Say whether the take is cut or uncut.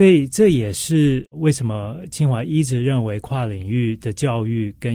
uncut